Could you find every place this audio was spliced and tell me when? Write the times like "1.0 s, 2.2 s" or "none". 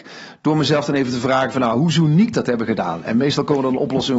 none